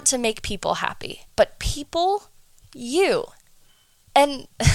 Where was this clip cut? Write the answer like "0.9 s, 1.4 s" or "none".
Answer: 1.3 s, 2.6 s